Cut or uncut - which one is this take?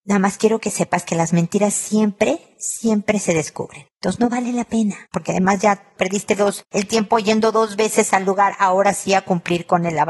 cut